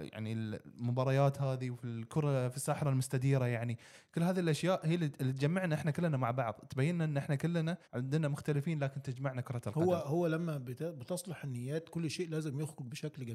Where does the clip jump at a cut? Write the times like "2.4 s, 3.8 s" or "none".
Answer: 7.8 s